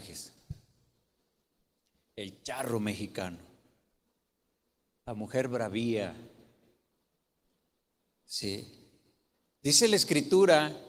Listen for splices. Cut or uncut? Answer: uncut